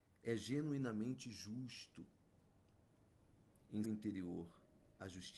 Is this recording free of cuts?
no; 1 cut; at 3.8 s

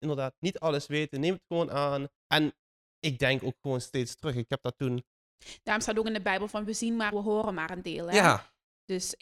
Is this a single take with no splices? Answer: no; 2 cuts; at 2.2 s, 7.1 s

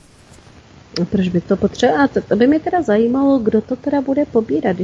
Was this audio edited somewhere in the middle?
yes; 1 cut; at 1.1 s

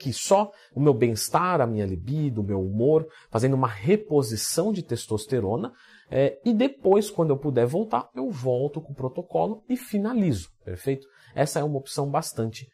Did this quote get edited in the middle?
no; 0 cuts

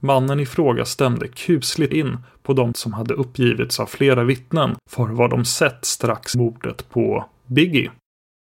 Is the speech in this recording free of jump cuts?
no; 4 cuts; at 1.9 s, 2.7 s, 4.8 s, 6.3 s

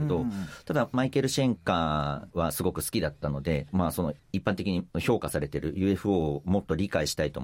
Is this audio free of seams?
yes; 0 cuts

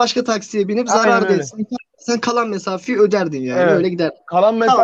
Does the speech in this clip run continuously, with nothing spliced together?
yes; 0 cuts

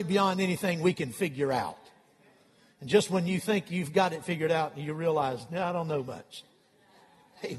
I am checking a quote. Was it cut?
no; 0 cuts

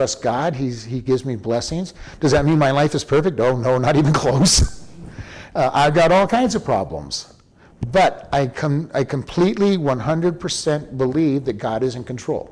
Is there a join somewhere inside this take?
no; 0 cuts

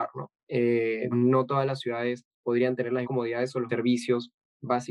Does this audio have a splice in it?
yes; 4 cuts; at 1.1 s, 2.3 s, 3.0 s, 3.7 s

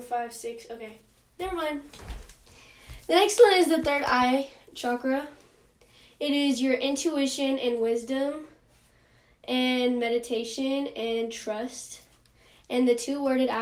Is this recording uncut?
yes; 0 cuts

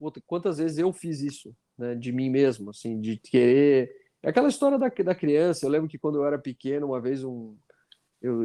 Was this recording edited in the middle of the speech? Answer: no; 0 cuts

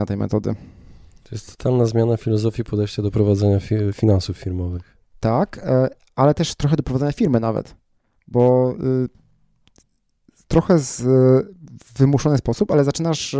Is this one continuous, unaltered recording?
yes; 0 cuts

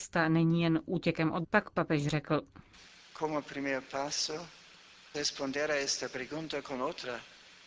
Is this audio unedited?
no; 2 cuts; at 1.4 s, 5.1 s

